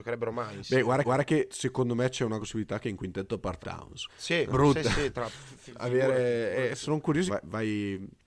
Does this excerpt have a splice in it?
yes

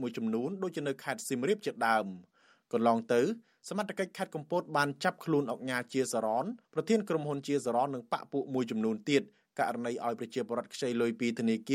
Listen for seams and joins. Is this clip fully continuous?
no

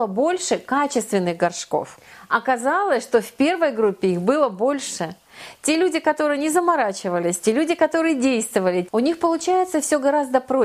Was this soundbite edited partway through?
no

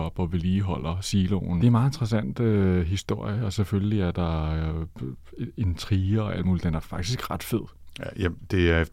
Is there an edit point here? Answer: yes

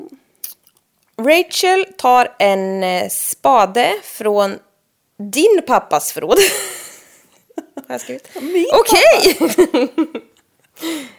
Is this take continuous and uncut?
yes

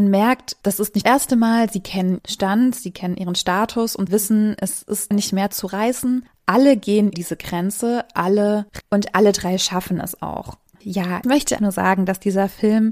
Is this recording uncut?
no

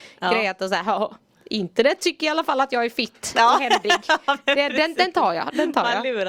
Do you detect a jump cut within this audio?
no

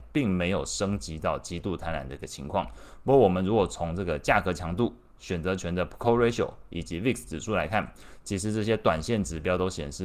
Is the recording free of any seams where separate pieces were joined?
yes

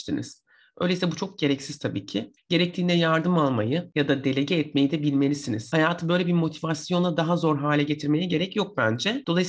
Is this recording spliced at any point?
yes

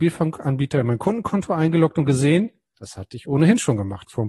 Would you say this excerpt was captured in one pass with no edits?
yes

